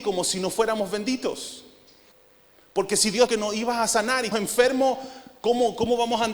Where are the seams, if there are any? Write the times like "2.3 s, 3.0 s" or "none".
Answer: 2.1 s, 3.3 s, 4.3 s